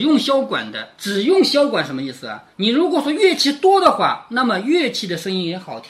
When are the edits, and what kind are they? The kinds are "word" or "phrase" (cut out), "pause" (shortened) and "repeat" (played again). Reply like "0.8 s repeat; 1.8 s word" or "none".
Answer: 0.9 s pause; 2.5 s pause